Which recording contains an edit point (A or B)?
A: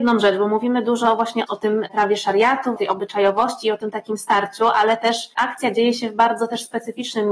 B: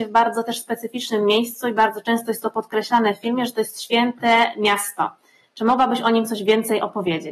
A